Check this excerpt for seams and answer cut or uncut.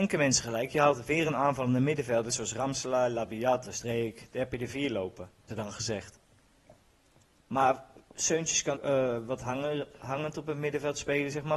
cut